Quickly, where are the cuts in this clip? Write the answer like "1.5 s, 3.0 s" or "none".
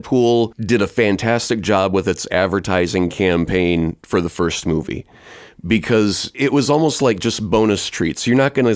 none